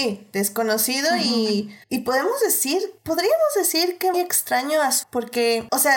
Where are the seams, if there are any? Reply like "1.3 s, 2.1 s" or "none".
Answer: 1.8 s, 3.0 s, 4.1 s, 5.0 s